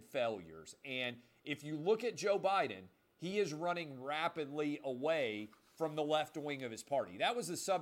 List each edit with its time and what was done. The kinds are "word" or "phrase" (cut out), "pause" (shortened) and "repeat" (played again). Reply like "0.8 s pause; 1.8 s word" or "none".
none

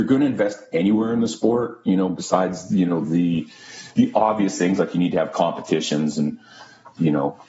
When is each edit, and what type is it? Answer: none

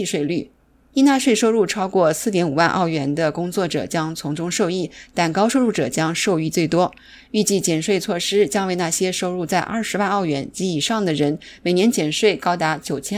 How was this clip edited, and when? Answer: none

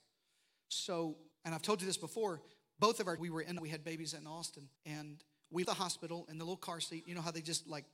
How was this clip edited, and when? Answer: 1.3 s word; 3.2 s word; 3.6 s word; 4.8 s pause; 5.6 s word

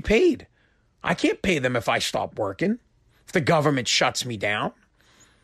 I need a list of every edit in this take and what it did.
none

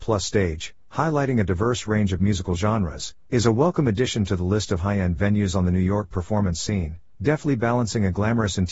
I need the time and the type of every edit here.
none

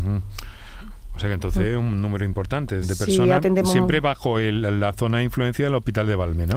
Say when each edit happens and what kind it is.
2.8 s word

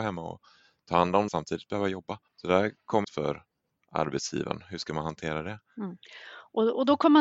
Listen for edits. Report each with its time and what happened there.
1.3 s phrase; 2.3 s pause; 3.0 s phrase

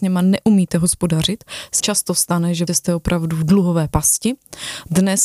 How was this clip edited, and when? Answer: 1.8 s word; 2.7 s word

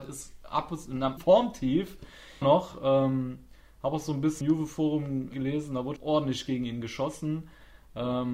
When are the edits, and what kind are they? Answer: 1.2 s word; 2.4 s word; 4.4 s word; 5.3 s word; 6.0 s word

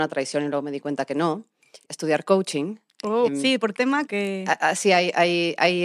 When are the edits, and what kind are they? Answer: 1.9 s phrase; 3.3 s word; 3.8 s word; 4.1 s word

